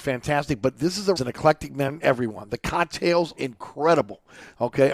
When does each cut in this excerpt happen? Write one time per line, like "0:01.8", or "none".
0:01.2
0:02.0
0:03.4

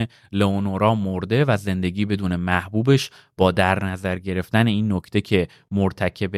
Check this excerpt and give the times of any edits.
none

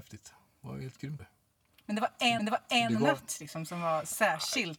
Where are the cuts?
0:01.2
0:02.4

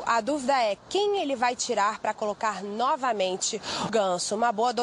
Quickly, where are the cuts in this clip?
0:03.9

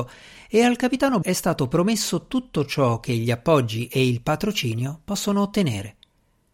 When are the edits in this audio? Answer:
0:01.2

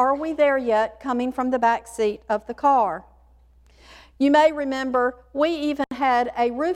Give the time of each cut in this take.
none

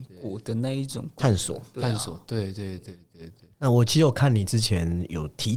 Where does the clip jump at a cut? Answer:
0:03.5

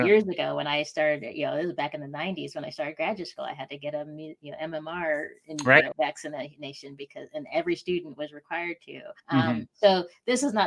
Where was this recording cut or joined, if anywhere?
0:05.9
0:09.2

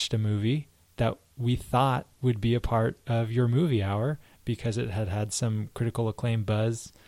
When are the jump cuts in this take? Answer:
0:02.1

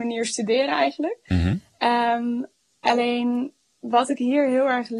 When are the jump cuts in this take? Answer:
none

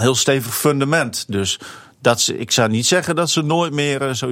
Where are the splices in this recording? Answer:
none

